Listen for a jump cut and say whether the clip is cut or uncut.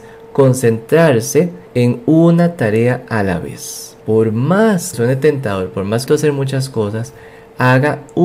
cut